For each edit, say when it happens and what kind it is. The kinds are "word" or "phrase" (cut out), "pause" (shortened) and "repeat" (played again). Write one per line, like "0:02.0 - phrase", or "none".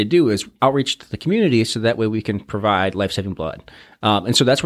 none